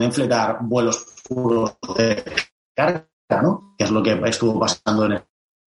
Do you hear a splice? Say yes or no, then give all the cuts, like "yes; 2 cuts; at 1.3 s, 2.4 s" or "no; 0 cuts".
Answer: no; 0 cuts